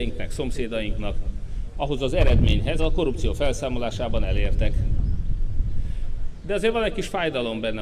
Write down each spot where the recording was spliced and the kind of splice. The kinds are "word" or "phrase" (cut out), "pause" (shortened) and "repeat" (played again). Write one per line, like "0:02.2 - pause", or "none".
0:02.8 - phrase